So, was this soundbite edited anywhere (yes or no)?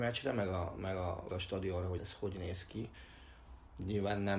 yes